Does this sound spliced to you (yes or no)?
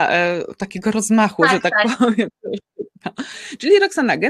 no